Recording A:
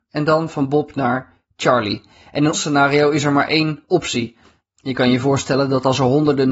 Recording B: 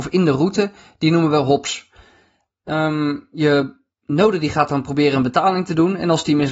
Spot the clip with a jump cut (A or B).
A